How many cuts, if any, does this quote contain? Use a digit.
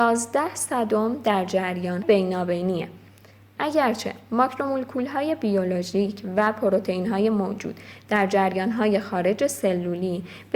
1